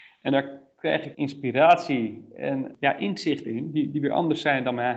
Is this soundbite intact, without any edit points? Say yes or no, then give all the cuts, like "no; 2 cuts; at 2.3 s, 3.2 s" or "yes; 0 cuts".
no; 2 cuts; at 1.1 s, 3.5 s